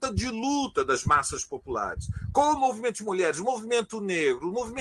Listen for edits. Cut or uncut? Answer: uncut